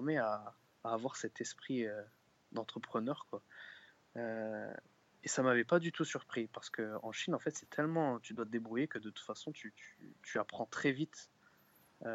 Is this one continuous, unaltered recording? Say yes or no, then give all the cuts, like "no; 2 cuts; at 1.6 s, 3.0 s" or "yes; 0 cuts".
yes; 0 cuts